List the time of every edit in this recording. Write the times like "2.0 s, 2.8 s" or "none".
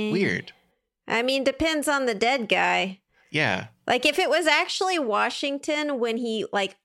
none